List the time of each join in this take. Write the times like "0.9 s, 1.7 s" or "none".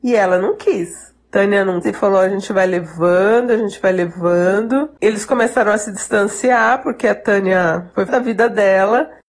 1.8 s, 8.1 s